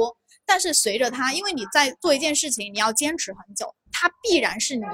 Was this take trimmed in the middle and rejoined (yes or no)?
yes